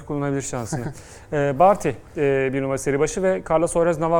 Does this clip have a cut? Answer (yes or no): no